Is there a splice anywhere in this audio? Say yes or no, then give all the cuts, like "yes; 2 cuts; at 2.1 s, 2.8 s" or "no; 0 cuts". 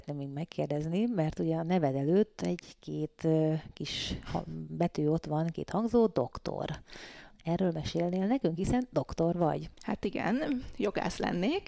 yes; 1 cut; at 9.7 s